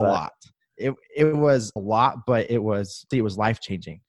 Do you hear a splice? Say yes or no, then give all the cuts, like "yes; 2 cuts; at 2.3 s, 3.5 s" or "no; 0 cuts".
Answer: yes; 2 cuts; at 1.8 s, 3.1 s